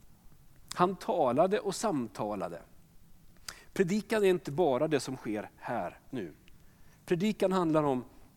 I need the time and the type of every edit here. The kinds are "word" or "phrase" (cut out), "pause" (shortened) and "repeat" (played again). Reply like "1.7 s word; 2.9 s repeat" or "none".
6.1 s word